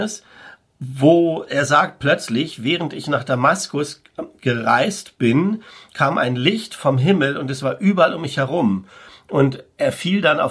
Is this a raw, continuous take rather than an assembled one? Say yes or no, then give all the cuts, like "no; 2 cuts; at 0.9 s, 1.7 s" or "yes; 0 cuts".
yes; 0 cuts